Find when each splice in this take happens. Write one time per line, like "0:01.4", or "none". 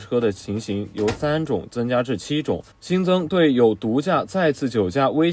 0:02.7